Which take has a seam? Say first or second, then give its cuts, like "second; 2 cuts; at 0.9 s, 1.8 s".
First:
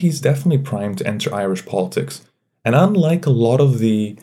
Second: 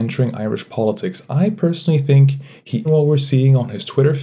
second; 1 cut; at 2.8 s